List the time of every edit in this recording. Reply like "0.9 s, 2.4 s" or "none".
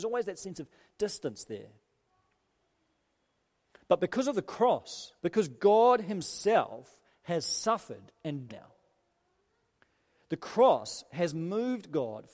5.2 s, 8.5 s